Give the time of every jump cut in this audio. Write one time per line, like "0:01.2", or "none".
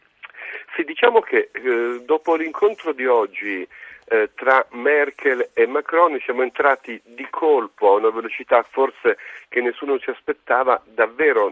none